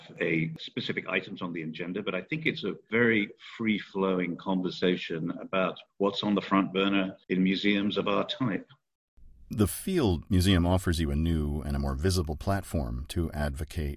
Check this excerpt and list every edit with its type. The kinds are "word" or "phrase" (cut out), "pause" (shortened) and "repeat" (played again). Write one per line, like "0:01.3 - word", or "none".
0:05.9 - pause
0:07.2 - pause